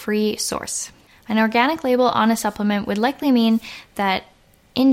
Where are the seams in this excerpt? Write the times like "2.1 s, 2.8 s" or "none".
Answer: none